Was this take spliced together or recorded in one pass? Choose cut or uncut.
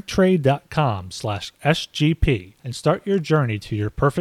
cut